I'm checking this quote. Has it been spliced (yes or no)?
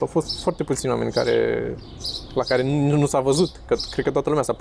no